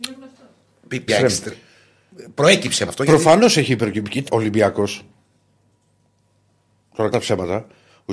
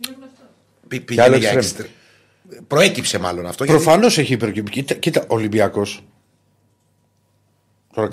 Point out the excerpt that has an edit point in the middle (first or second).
first